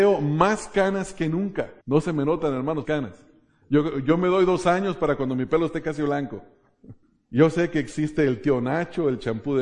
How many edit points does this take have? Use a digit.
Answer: 3